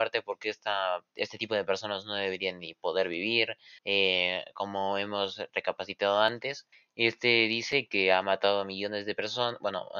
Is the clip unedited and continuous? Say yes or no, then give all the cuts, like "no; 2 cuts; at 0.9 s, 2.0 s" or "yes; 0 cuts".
no; 3 cuts; at 1.1 s, 3.8 s, 6.7 s